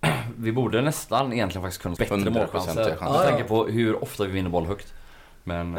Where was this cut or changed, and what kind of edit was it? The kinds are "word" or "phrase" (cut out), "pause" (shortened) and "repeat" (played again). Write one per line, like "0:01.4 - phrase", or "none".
0:02.0 - phrase